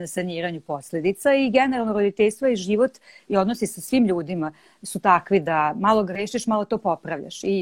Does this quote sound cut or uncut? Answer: uncut